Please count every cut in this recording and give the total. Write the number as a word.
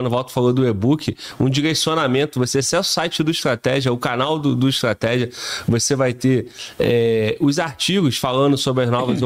zero